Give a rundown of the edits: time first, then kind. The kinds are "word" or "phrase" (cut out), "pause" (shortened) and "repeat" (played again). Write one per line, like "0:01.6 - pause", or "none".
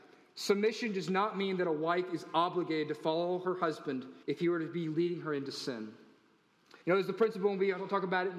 0:04.2 - pause
0:06.8 - pause